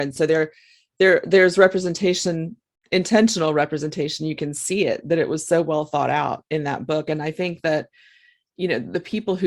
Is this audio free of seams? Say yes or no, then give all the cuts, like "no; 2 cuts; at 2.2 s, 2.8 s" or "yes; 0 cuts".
yes; 0 cuts